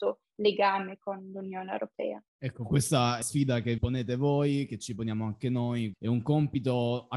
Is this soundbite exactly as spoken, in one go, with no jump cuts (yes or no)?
no